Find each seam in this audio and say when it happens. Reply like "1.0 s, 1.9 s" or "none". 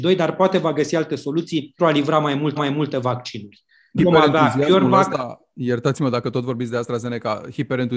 1.8 s, 2.6 s, 4.0 s